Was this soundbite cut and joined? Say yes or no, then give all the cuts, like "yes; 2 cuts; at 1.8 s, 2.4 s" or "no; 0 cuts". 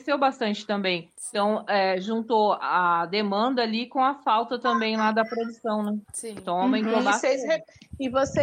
yes; 1 cut; at 6.0 s